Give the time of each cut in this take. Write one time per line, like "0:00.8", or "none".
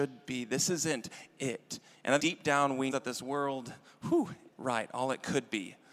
0:02.2
0:02.9
0:04.5